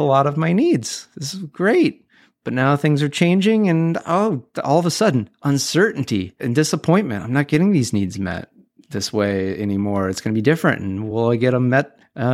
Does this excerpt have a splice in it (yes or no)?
no